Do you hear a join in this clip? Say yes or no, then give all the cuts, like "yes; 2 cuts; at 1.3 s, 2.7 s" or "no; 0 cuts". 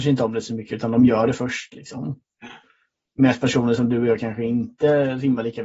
no; 0 cuts